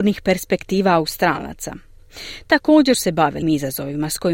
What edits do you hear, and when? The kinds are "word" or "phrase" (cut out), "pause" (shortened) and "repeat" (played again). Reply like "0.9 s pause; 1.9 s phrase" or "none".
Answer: 2.9 s word; 3.4 s word